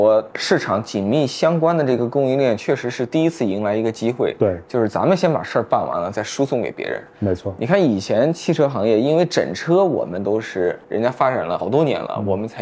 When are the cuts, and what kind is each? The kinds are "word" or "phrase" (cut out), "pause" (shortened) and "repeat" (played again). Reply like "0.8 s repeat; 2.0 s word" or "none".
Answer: 10.8 s pause